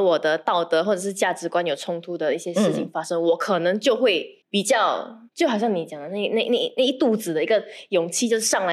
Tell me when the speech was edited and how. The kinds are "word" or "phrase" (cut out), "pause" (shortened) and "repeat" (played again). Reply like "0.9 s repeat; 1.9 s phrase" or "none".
4.4 s pause; 5.3 s pause